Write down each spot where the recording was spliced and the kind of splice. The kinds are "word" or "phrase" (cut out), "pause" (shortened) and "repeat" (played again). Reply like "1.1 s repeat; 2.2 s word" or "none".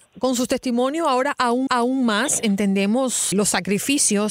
1.7 s repeat; 3.3 s word